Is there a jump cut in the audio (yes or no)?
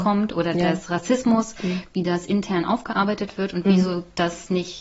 no